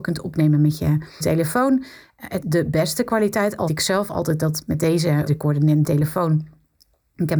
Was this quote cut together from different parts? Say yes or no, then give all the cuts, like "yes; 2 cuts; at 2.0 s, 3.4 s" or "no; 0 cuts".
yes; 5 cuts; at 1.2 s, 2.4 s, 3.7 s, 5.3 s, 5.8 s